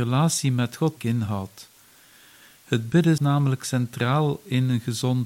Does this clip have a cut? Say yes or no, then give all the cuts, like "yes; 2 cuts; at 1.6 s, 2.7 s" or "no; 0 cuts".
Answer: yes; 2 cuts; at 1.0 s, 3.2 s